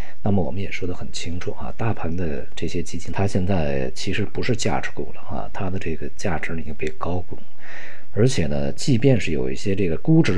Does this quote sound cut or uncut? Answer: cut